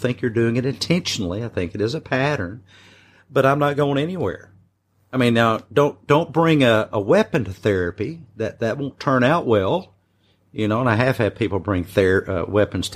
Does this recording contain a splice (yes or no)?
no